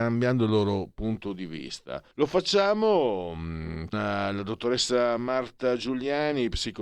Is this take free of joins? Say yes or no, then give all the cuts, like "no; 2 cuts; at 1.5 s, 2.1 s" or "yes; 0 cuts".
no; 2 cuts; at 2.1 s, 3.9 s